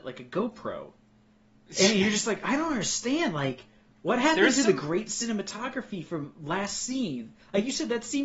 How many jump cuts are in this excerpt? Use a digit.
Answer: 0